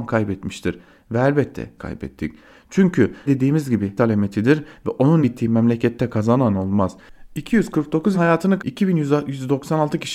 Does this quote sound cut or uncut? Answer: cut